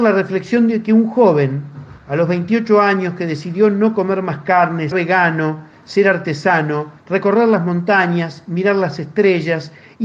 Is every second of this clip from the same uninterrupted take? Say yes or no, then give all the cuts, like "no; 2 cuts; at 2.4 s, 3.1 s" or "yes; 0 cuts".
no; 3 cuts; at 2.0 s, 4.9 s, 7.0 s